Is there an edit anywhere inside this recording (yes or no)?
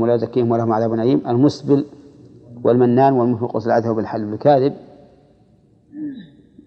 no